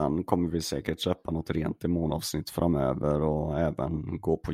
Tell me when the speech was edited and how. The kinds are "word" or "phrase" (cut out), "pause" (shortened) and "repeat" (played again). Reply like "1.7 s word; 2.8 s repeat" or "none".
none